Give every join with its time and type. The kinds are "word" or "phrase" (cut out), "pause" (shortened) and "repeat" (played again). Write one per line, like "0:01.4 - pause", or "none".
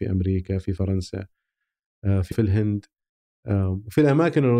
0:02.3 - word